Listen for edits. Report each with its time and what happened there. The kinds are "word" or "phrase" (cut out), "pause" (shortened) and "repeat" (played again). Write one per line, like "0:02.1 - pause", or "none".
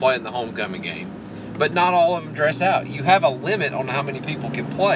none